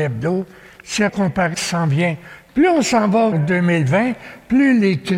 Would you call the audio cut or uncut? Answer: cut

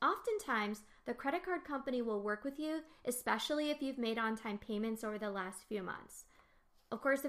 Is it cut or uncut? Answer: uncut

